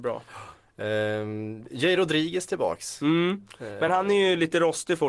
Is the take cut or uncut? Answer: uncut